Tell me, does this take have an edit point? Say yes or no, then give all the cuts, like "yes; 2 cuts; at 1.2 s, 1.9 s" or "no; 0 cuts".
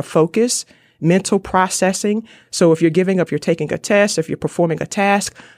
yes; 1 cut; at 3.3 s